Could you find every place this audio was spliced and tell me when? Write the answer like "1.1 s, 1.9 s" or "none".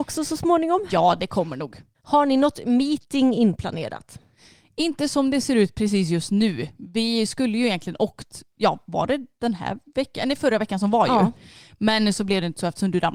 none